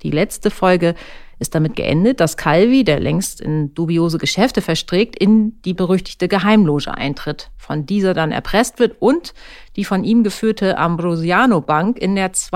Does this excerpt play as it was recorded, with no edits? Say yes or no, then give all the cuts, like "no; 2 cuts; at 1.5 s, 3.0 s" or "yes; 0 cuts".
no; 1 cut; at 5.8 s